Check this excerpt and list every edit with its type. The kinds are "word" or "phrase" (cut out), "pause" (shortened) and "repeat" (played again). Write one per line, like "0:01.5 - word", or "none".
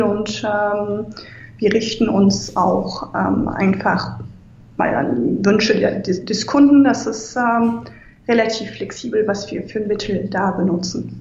none